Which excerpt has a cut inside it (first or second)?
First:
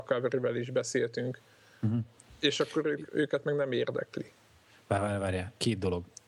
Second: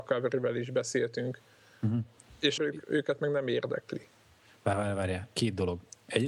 second